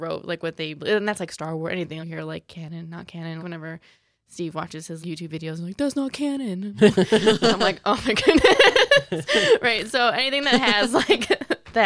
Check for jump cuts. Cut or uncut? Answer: cut